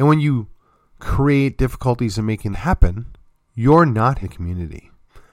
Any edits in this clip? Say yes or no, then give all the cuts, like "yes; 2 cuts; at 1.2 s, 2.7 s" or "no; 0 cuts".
yes; 2 cuts; at 2.5 s, 4.2 s